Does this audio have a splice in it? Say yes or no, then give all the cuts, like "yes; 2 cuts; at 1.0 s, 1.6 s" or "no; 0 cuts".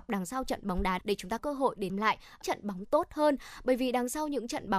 yes; 5 cuts; at 1.0 s, 1.4 s, 1.9 s, 2.4 s, 2.8 s